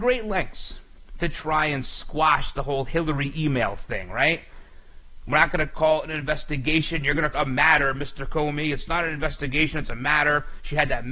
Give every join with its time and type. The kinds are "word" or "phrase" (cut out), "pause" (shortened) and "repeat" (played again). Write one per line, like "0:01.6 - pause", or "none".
0:07.3 - word

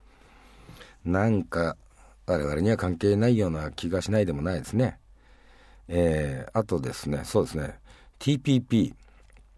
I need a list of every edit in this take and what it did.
none

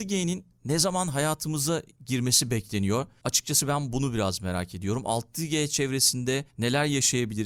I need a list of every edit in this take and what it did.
0:06.5 - pause

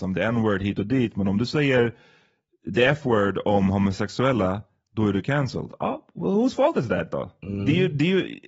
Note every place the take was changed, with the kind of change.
none

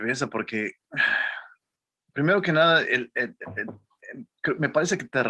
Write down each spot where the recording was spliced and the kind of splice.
none

